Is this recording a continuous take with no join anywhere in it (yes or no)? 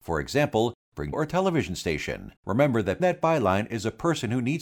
no